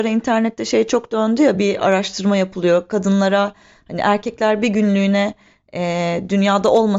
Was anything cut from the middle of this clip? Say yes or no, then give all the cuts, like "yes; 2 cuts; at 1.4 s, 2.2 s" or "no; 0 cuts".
no; 0 cuts